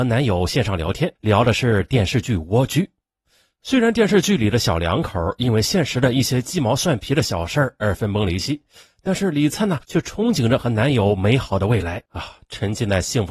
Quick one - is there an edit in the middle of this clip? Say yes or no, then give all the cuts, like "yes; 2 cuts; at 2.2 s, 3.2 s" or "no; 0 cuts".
yes; 2 cuts; at 1.2 s, 9.8 s